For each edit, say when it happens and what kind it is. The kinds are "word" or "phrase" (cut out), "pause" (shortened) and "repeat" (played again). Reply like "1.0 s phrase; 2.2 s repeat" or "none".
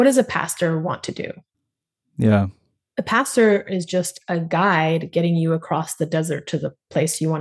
none

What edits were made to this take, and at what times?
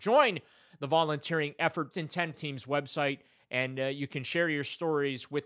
1.9 s phrase; 2.3 s phrase

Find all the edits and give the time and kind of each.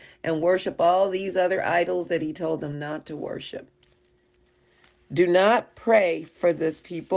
none

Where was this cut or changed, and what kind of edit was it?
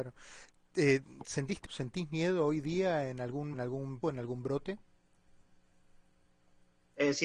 1.6 s word; 3.5 s word; 4.0 s word

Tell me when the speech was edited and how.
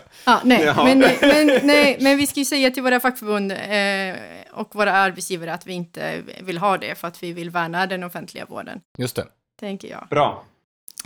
none

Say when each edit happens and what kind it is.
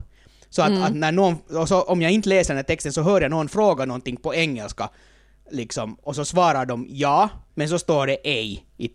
7.5 s pause

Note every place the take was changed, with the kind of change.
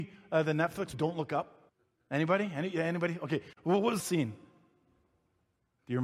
0.9 s word; 1.7 s pause; 3.5 s pause; 4.0 s phrase

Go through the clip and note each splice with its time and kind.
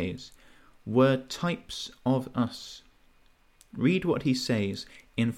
none

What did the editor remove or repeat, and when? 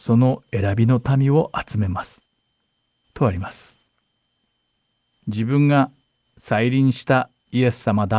none

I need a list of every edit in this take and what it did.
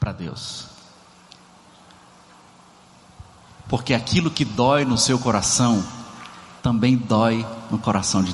none

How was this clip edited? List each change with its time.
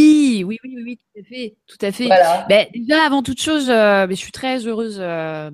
none

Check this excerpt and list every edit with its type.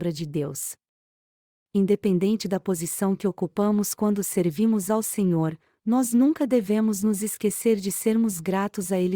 none

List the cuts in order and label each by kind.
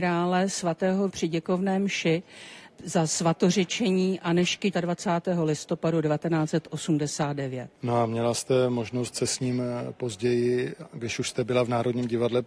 1.1 s word; 4.7 s word; 7.7 s pause

